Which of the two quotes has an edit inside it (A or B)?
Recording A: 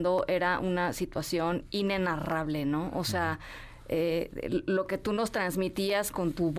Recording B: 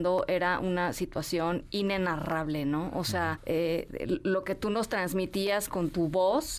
B